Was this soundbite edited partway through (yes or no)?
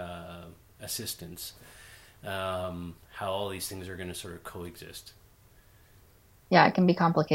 no